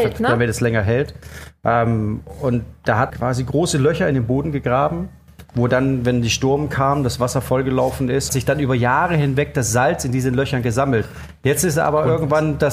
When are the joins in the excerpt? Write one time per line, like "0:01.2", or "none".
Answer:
0:03.1
0:08.3